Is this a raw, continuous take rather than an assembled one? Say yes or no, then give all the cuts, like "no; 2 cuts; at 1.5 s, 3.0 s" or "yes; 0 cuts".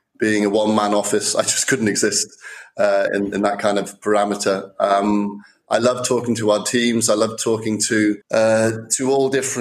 no; 1 cut; at 8.2 s